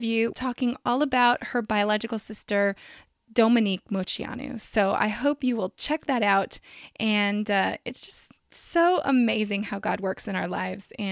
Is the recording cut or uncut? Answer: uncut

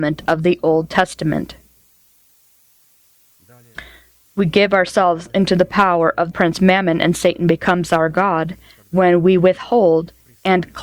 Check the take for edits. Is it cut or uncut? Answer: cut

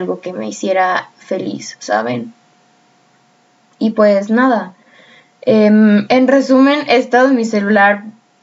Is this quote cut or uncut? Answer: uncut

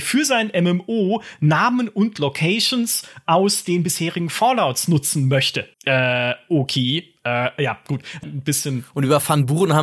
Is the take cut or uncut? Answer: cut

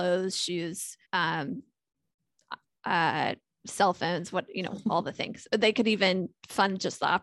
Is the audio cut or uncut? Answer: cut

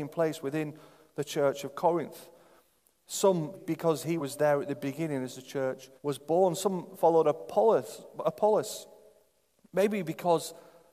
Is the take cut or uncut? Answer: cut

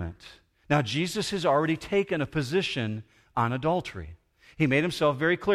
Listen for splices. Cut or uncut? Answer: uncut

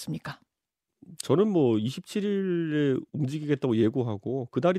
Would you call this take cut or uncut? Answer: cut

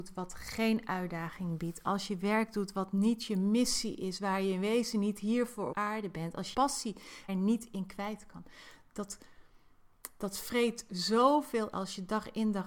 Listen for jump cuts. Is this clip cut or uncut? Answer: cut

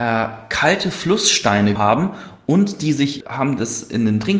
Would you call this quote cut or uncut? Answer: cut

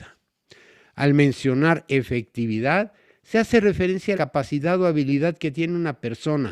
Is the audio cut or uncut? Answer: cut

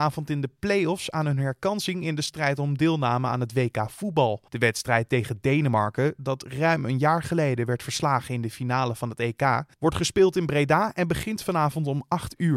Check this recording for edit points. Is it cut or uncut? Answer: cut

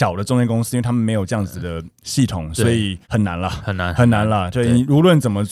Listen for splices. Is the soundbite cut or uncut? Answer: cut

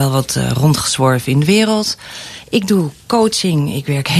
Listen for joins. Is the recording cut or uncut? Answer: uncut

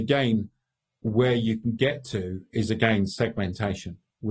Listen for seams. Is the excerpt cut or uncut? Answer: uncut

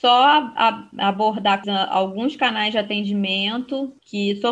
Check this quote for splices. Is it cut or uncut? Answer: cut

